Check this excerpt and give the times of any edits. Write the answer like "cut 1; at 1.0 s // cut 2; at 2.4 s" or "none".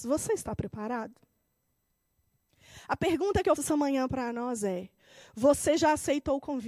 cut 1; at 3.6 s